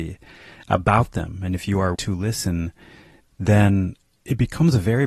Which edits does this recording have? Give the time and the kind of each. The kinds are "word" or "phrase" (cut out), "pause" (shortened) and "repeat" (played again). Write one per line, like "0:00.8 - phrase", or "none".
0:01.9 - word
0:03.2 - phrase